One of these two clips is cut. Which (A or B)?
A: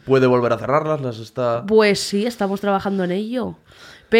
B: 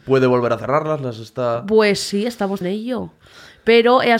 B